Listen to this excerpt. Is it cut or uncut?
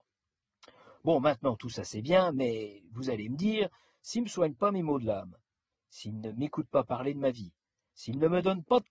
uncut